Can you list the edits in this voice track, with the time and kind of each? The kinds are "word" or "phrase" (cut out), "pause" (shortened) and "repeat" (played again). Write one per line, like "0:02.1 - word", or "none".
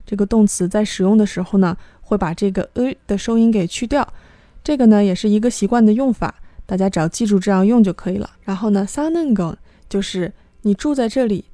0:08.3 - pause

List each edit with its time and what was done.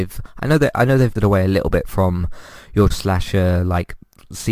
0:01.2 - word
0:02.9 - word

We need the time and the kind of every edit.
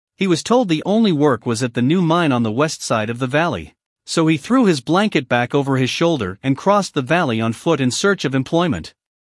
none

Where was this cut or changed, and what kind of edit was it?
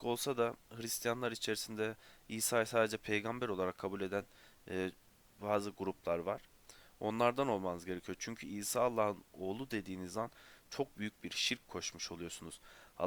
0:11.6 - word

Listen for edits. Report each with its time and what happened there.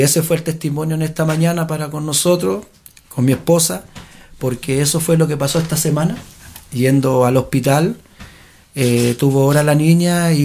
none

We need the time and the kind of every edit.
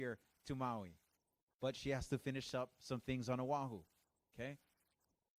none

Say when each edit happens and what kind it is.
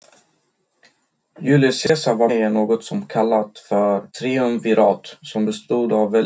0:02.3 - word
0:04.1 - pause

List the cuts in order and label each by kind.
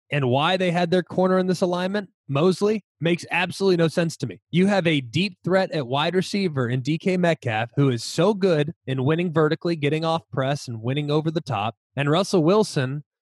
0:02.9 - pause
0:04.4 - pause
0:08.8 - pause
0:11.8 - pause

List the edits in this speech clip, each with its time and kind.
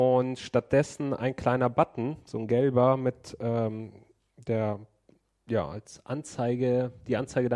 none

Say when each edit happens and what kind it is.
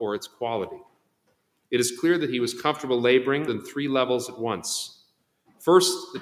0:03.5 - phrase

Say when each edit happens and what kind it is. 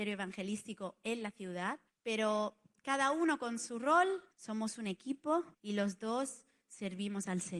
0:01.9 - pause
0:04.3 - pause
0:05.5 - pause

